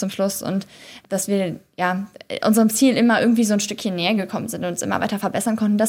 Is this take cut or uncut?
uncut